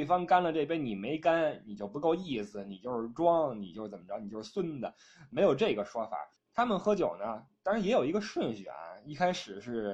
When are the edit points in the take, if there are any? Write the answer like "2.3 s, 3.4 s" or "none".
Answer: 6.4 s